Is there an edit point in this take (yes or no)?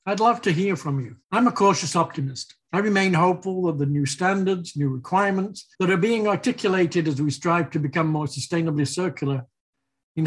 yes